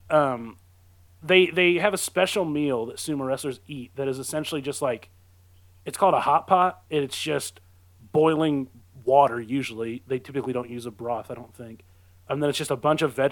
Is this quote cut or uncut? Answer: cut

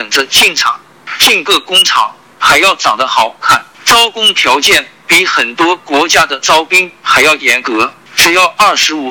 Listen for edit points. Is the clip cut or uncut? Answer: cut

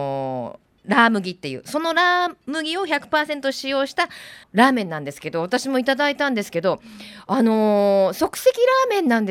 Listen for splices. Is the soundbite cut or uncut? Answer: cut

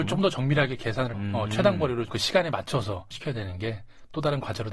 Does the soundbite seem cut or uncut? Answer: cut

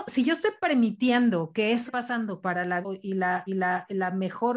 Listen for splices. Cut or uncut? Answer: cut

